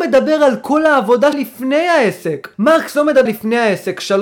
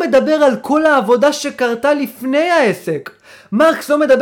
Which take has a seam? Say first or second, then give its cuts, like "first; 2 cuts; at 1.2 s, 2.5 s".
first; 3 cuts; at 1.3 s, 2.5 s, 3.3 s